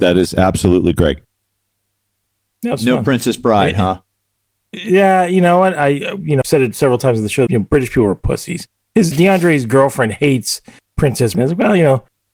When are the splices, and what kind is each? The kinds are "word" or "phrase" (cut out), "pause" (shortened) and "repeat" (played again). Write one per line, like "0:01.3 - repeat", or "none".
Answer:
0:06.4 - word
0:07.5 - word
0:09.1 - word
0:11.3 - word